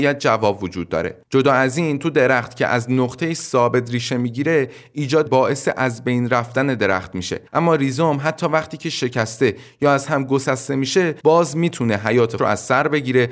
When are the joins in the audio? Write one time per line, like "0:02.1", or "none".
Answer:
0:05.3
0:07.5
0:11.2
0:12.4